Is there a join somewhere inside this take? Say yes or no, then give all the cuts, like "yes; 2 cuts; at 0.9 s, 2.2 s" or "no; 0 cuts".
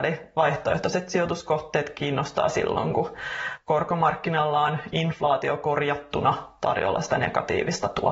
no; 0 cuts